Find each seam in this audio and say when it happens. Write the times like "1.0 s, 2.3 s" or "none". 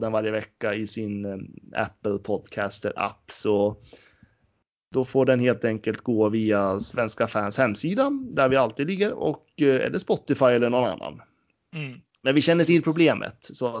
none